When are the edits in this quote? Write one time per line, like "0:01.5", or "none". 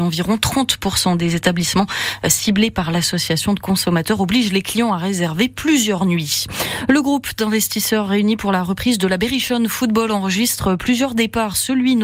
none